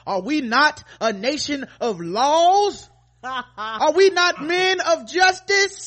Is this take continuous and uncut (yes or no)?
yes